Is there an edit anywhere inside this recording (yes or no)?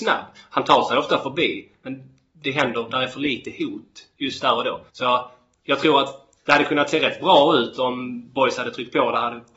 yes